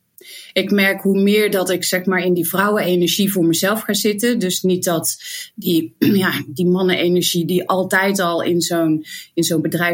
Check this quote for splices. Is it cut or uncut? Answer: uncut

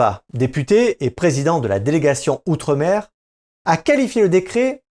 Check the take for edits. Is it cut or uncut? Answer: uncut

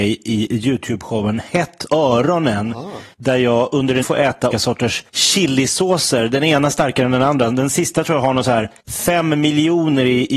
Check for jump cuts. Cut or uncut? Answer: cut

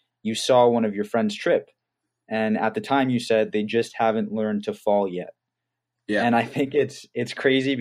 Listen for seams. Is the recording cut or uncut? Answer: uncut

